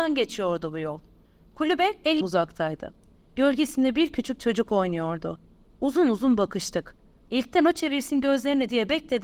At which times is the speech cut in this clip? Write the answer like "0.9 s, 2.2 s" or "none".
2.2 s

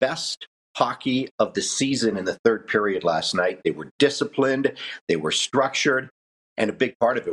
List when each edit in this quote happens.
none

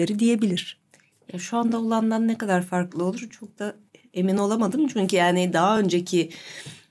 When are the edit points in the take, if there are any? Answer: none

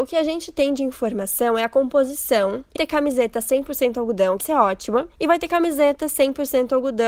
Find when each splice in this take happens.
2.7 s, 4.4 s

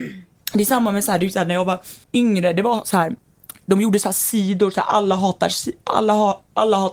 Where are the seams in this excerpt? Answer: 2.0 s

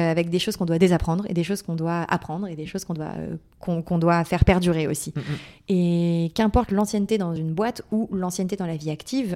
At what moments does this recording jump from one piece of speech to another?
none

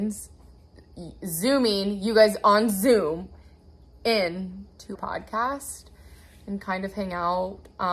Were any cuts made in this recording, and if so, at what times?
4.9 s

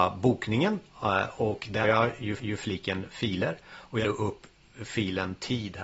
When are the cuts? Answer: 1.8 s, 2.4 s, 4.0 s

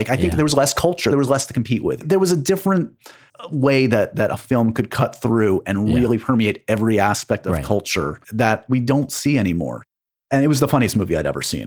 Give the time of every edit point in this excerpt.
8.2 s

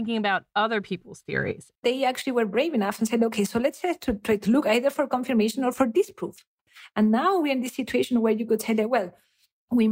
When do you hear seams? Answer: 1.8 s

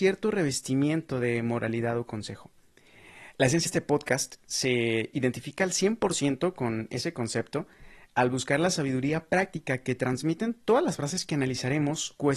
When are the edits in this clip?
3.7 s

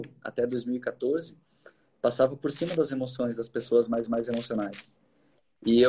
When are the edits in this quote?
4.1 s

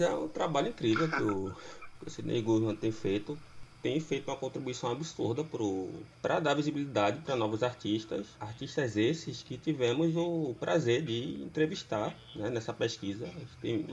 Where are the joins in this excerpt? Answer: 6.1 s, 8.3 s

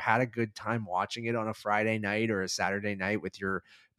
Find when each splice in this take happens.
none

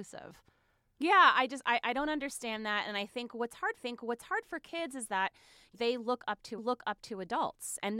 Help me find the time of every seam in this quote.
3.8 s, 5.7 s, 6.6 s

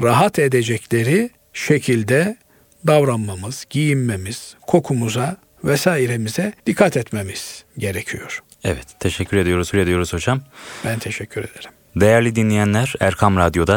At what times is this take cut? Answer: 1.4 s, 6.6 s, 7.7 s, 9.7 s

